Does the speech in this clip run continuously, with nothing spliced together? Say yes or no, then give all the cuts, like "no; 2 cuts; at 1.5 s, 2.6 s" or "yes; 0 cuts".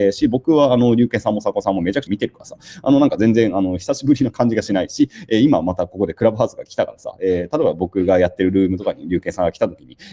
no; 1 cut; at 2.1 s